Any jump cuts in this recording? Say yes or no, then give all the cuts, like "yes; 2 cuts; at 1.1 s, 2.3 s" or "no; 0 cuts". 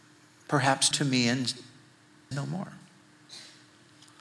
yes; 2 cuts; at 0.9 s, 2.3 s